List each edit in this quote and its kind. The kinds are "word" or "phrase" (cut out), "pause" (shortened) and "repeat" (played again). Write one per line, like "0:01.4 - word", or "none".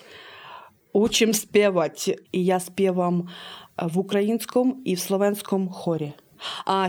0:02.2 - pause